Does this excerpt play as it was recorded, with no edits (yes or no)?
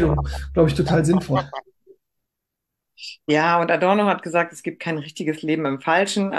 yes